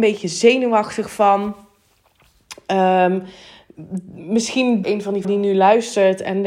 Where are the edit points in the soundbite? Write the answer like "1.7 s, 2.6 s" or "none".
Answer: 4.8 s, 5.2 s